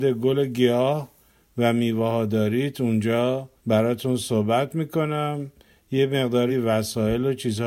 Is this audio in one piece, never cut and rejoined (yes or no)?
no